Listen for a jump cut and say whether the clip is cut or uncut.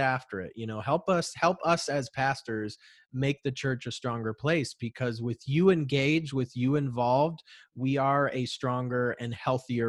uncut